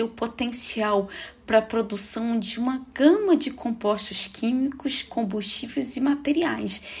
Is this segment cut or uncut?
uncut